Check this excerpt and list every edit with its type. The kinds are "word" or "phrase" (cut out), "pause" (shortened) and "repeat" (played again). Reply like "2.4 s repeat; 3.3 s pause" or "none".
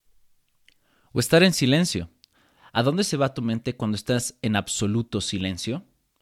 none